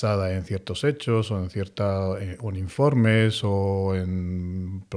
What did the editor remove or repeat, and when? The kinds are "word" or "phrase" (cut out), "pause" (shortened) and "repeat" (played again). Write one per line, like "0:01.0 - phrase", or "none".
none